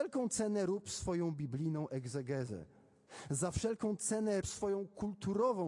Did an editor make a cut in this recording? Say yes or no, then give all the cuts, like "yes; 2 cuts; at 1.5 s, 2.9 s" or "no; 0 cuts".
yes; 1 cut; at 4.4 s